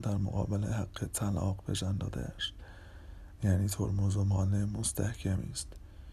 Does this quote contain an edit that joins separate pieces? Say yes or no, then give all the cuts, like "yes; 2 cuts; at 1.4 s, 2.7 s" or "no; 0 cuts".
no; 0 cuts